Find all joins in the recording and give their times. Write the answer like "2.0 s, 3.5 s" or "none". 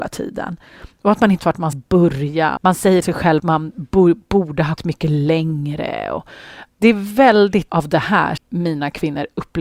1.4 s, 1.7 s, 2.6 s, 3.0 s, 3.4 s, 4.8 s, 6.7 s, 7.7 s, 8.4 s